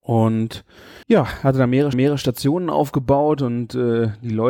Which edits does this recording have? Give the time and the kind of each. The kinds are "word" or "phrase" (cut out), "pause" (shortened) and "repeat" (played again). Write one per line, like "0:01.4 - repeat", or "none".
0:01.0 - pause
0:01.9 - repeat